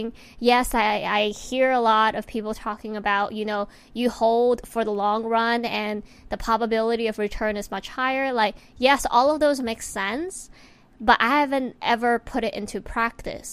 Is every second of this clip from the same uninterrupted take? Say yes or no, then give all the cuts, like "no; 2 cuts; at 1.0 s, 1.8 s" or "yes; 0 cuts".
yes; 0 cuts